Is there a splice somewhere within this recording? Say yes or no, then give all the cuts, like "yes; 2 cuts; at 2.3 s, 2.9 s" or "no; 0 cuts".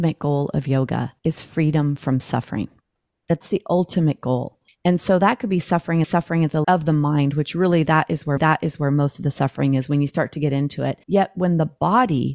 yes; 7 cuts; at 1.2 s, 3.4 s, 4.7 s, 6.0 s, 6.6 s, 8.4 s, 11.0 s